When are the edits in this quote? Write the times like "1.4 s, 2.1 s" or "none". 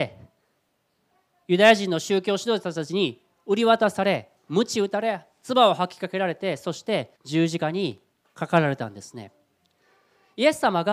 7.2 s